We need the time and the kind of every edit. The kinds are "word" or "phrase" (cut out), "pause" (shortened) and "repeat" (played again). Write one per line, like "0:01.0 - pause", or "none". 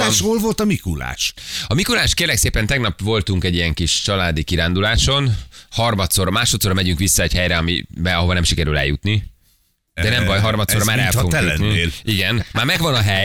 none